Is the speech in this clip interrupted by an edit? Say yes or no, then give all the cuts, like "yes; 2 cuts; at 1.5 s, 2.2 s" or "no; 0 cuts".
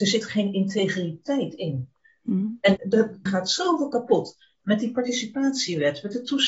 yes; 2 cuts; at 2.8 s, 3.3 s